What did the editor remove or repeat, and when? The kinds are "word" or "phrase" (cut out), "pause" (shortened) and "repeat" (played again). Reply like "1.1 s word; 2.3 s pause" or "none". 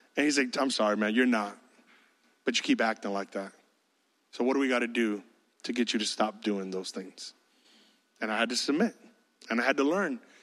none